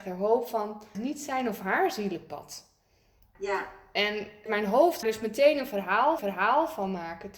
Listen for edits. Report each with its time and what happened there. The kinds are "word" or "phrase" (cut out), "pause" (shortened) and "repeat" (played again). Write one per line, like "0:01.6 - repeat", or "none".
0:00.9 - phrase
0:03.3 - word
0:04.5 - word
0:05.0 - phrase
0:06.2 - repeat